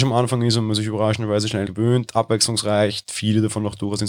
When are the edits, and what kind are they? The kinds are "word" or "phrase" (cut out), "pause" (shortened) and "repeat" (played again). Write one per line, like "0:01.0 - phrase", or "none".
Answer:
0:01.7 - word
0:02.1 - phrase